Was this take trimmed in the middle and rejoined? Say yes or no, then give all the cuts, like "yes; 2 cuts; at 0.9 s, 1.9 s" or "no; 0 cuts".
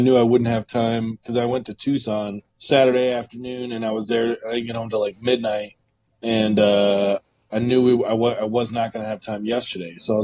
yes; 1 cut; at 2.5 s